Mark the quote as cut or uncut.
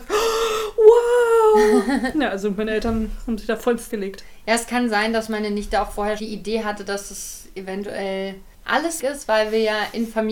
cut